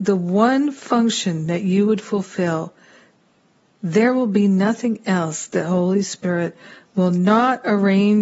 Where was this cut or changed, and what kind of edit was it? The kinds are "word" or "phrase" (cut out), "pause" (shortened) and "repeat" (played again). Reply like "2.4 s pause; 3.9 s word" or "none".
none